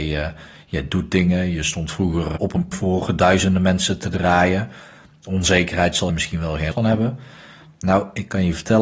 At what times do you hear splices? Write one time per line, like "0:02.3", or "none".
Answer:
0:02.4
0:02.7
0:06.1
0:06.7